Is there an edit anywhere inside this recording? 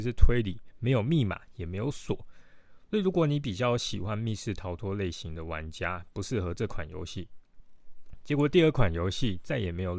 no; 0 cuts

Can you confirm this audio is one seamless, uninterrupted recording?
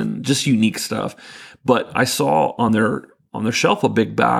yes; 0 cuts

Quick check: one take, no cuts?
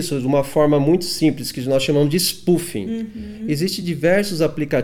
yes; 0 cuts

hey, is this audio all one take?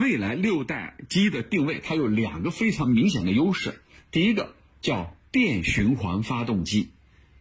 yes; 0 cuts

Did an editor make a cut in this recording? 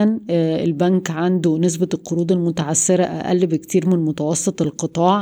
no; 0 cuts

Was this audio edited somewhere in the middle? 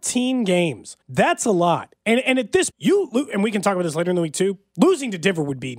yes; 2 cuts; at 1.0 s, 2.7 s

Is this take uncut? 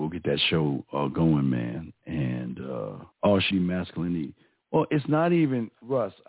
no; 2 cuts; at 3.1 s, 3.5 s

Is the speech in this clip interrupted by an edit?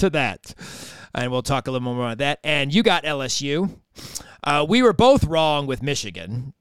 no; 0 cuts

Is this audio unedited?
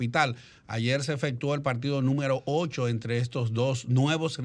yes; 0 cuts

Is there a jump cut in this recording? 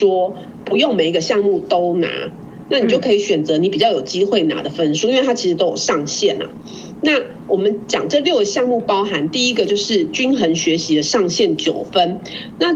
no; 0 cuts

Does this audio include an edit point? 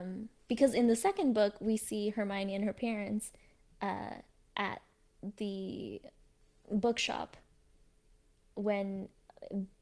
no; 0 cuts

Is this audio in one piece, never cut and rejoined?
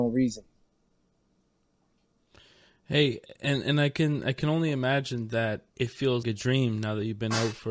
no; 2 cuts; at 5.7 s, 6.2 s

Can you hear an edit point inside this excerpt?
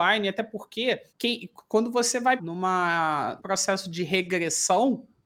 yes; 3 cuts; at 1.1 s, 2.4 s, 3.4 s

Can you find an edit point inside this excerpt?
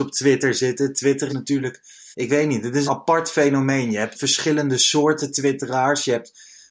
yes; 4 cuts; at 1.3 s, 2.1 s, 2.9 s, 4.1 s

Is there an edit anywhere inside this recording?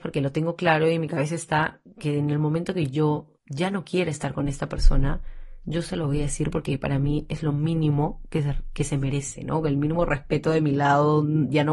yes; 1 cut; at 3.4 s

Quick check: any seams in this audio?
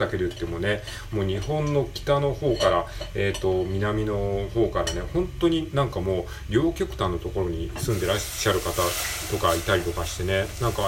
no; 0 cuts

